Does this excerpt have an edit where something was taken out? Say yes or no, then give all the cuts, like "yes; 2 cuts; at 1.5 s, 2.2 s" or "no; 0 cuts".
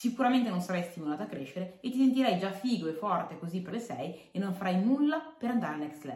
yes; 1 cut; at 3.7 s